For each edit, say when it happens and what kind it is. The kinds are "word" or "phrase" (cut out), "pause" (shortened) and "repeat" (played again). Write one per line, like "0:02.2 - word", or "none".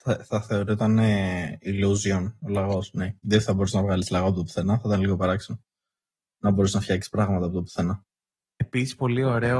none